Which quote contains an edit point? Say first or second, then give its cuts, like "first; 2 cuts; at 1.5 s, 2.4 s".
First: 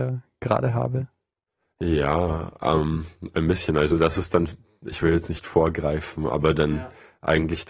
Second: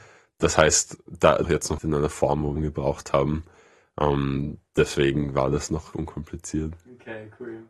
second; 4 cuts; at 1.4 s, 1.8 s, 2.6 s, 5.9 s